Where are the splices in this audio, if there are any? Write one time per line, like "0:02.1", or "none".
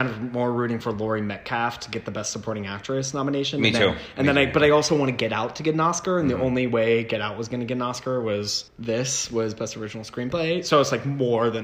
0:08.7